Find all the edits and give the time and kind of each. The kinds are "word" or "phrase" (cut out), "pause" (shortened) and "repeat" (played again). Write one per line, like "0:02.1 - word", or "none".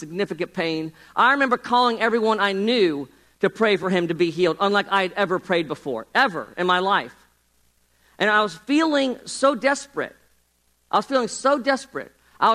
none